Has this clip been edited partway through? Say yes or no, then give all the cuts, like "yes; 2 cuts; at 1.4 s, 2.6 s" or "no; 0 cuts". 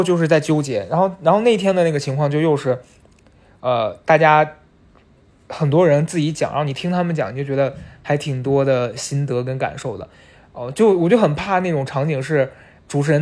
no; 0 cuts